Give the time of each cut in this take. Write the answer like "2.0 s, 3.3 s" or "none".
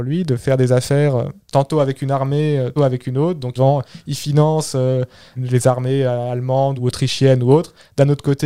2.8 s, 3.6 s, 5.4 s, 6.8 s